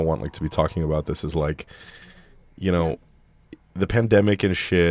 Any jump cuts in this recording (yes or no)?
no